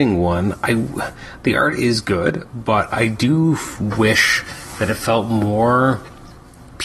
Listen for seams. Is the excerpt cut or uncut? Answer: uncut